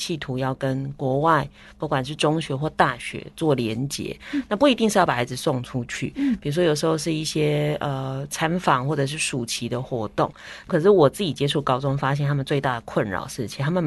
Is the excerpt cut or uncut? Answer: uncut